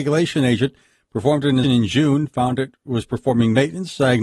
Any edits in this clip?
yes; 1 cut; at 1.6 s

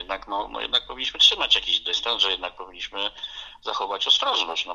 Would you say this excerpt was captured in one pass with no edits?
yes; 0 cuts

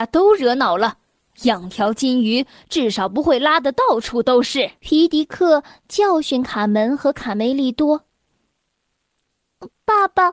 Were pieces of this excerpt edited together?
yes; 1 cut; at 4.8 s

